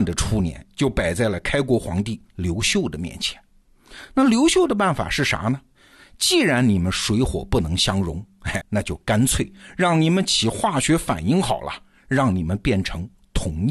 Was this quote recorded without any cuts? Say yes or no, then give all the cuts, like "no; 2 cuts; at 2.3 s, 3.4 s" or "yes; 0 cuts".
no; 1 cut; at 8.6 s